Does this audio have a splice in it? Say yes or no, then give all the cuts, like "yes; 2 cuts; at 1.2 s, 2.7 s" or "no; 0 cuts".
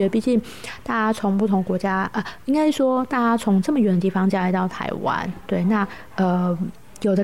no; 0 cuts